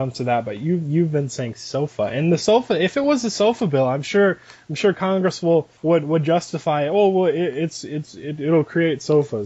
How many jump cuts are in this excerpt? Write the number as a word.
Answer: one